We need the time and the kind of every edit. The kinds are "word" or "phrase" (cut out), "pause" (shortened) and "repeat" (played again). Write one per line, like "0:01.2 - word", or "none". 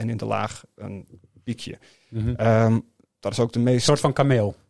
0:03.1 - pause